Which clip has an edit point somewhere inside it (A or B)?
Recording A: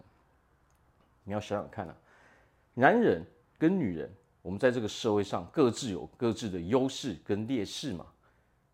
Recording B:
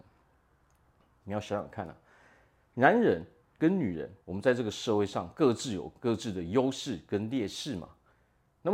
B